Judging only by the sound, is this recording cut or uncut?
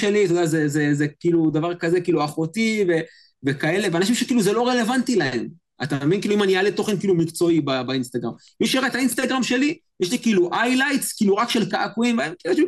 cut